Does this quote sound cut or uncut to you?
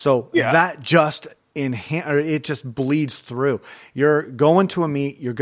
uncut